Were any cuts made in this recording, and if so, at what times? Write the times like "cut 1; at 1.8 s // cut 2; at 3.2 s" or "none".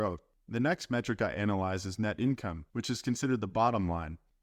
cut 1; at 2.7 s